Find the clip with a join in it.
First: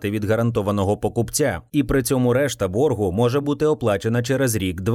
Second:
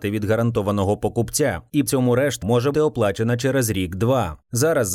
second; 3 cuts; at 1.9 s, 2.4 s, 2.7 s

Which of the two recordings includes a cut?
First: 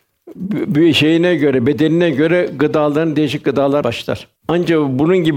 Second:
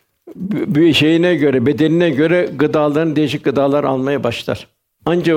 first; 2 cuts; at 3.8 s, 4.4 s

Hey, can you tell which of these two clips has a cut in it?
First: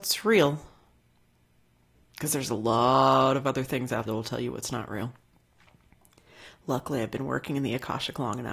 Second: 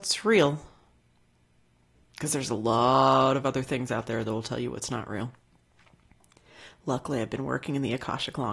first; 1 cut; at 4.1 s

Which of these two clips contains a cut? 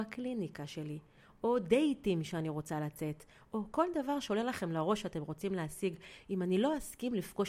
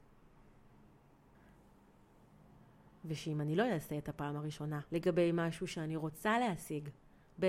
second; 1 cut; at 4.9 s

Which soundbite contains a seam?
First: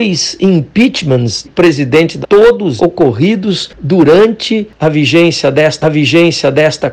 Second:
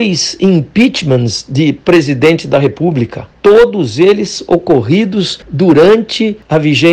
first; 4 cuts; at 1.4 s, 2.2 s, 2.8 s, 5.8 s

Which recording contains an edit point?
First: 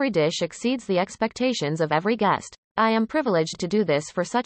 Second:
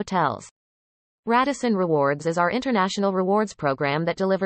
first; 1 cut; at 2.6 s

